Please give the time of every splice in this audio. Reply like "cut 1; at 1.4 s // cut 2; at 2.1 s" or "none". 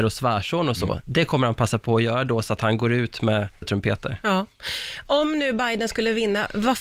cut 1; at 3.6 s